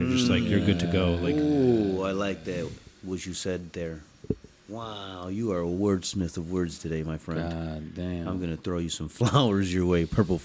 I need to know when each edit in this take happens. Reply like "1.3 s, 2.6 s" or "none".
none